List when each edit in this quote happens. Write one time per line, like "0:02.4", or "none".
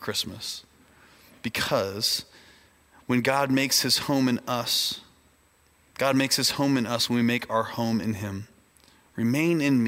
none